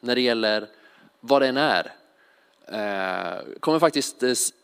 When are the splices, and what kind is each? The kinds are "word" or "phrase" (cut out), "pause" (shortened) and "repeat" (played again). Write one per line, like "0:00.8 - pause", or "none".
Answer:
0:03.6 - pause